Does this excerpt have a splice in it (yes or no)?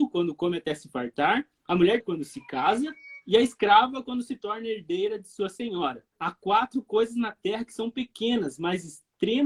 yes